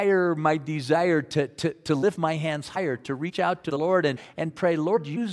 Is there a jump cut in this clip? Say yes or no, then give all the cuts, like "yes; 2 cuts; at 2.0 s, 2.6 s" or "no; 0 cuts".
no; 0 cuts